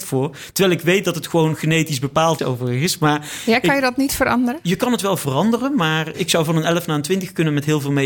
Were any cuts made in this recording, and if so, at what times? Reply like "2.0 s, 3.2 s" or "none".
2.4 s, 6.1 s